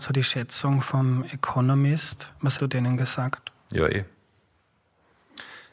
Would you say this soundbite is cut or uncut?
cut